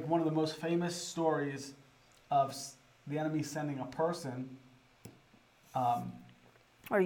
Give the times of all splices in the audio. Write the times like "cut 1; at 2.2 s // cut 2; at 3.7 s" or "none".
none